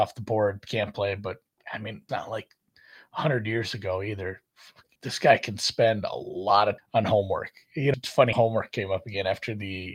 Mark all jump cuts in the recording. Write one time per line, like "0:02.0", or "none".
0:02.1
0:04.9
0:06.8
0:07.9
0:08.3